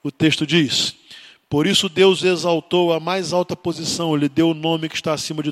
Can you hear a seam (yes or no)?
no